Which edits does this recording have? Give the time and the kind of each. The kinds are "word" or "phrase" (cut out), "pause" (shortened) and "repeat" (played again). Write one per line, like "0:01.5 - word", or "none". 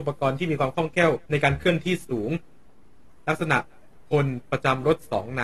0:01.3 - pause